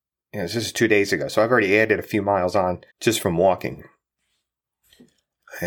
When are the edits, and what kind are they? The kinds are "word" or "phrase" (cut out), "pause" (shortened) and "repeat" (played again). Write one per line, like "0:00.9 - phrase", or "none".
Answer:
0:02.9 - pause